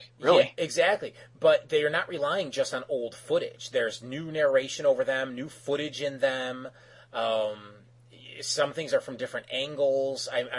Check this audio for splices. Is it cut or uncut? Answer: uncut